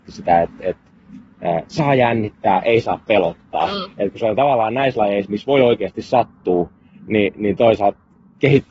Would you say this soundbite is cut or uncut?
uncut